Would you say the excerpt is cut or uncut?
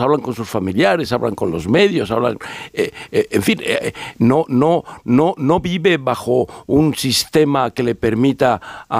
uncut